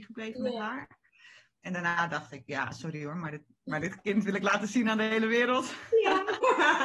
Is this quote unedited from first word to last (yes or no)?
yes